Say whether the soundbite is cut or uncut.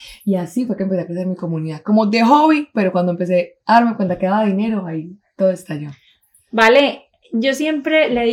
uncut